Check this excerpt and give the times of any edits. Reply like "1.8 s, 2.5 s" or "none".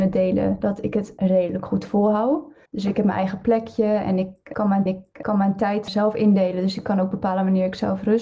2.7 s, 4.9 s